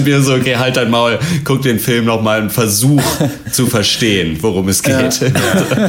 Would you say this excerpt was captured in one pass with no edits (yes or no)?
yes